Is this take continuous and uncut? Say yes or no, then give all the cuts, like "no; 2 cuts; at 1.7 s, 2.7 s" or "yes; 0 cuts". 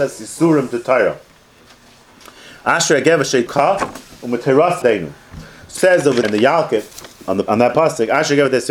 no; 5 cuts; at 3.5 s, 4.8 s, 5.8 s, 6.2 s, 7.5 s